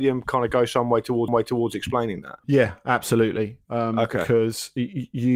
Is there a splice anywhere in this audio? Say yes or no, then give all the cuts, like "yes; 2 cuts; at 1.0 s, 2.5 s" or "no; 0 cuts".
yes; 2 cuts; at 1.3 s, 2.4 s